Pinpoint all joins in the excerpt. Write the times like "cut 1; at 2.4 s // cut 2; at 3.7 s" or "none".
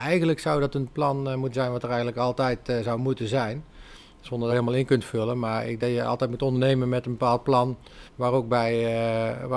cut 1; at 4.5 s // cut 2; at 5.8 s // cut 3; at 8.1 s